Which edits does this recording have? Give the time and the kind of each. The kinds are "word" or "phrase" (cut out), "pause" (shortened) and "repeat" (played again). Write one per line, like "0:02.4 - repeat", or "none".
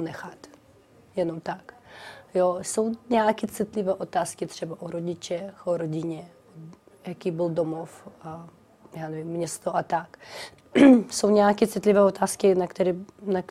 none